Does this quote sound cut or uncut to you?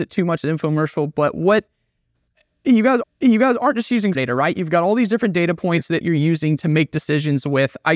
cut